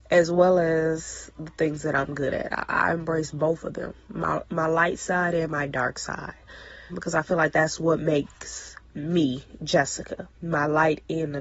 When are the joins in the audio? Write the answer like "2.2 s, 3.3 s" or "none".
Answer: 6.9 s, 10.3 s